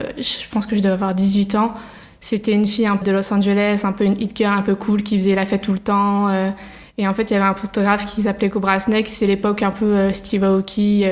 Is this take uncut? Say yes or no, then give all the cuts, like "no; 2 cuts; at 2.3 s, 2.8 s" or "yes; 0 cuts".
no; 1 cut; at 3.0 s